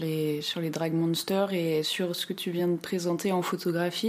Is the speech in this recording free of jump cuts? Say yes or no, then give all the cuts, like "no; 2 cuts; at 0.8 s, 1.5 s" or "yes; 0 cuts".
yes; 0 cuts